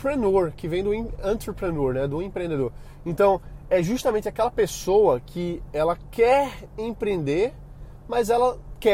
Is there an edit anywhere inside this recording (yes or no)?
no